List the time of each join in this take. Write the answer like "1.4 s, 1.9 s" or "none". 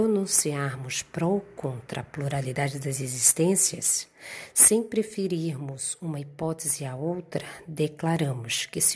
none